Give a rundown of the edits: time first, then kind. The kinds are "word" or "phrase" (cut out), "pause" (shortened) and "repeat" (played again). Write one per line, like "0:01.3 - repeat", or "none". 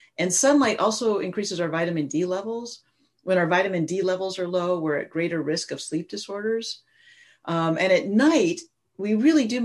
none